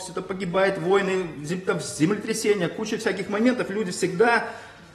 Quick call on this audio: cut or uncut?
uncut